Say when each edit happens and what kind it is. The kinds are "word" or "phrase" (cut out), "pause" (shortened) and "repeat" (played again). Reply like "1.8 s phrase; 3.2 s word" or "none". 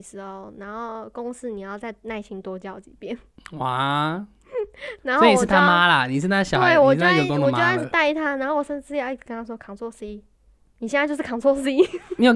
none